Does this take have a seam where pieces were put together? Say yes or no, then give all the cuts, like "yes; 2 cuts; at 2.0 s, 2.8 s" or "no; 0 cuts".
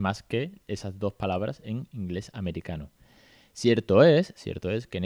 no; 0 cuts